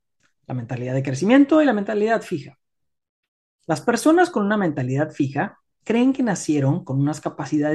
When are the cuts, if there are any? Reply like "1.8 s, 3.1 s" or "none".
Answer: none